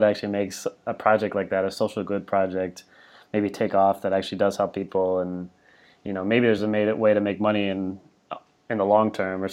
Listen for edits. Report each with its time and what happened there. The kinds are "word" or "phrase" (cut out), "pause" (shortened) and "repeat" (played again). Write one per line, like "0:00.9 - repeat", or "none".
none